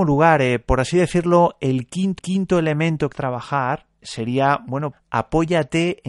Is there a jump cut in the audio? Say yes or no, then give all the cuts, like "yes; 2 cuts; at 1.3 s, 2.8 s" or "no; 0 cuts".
yes; 4 cuts; at 2.2 s, 3.1 s, 4.0 s, 4.9 s